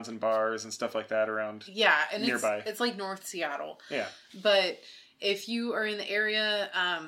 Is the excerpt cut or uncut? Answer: uncut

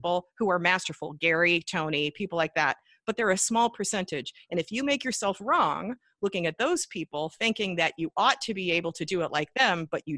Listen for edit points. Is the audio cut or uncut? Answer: uncut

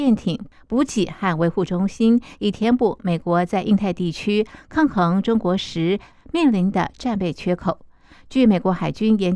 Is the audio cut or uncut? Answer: uncut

